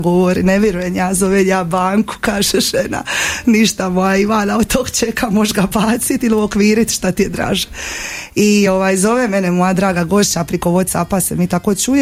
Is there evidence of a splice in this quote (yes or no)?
no